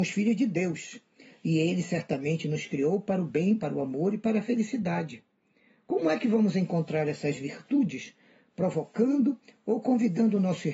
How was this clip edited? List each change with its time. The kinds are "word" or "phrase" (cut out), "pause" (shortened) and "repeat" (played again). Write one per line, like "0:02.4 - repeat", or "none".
none